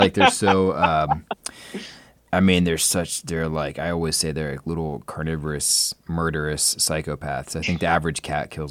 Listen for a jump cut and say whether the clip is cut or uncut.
uncut